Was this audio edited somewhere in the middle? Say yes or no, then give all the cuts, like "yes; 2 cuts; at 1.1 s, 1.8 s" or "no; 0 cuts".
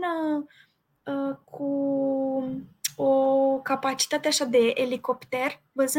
no; 0 cuts